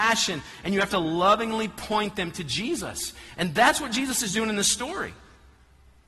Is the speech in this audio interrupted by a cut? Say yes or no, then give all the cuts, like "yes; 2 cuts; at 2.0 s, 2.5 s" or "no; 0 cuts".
no; 0 cuts